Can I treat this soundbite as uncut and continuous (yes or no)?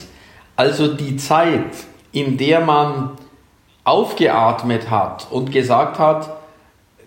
yes